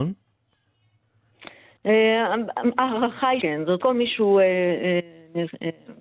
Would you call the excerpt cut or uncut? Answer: cut